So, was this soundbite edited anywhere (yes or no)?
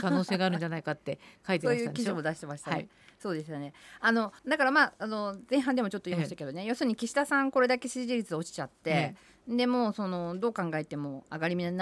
yes